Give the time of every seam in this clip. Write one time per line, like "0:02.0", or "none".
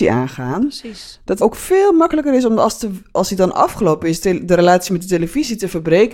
0:01.4
0:04.2